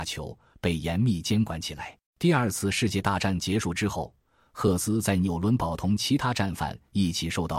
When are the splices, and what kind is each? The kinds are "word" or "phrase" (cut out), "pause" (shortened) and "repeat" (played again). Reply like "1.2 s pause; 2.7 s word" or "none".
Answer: 2.1 s pause

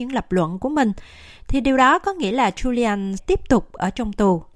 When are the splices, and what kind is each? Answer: 3.2 s word

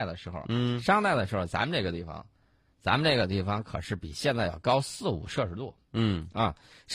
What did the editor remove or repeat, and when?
none

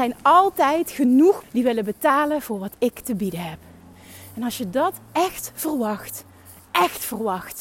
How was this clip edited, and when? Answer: 1.4 s word

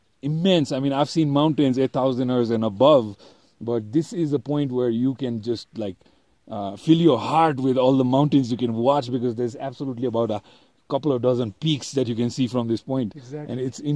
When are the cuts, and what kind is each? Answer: none

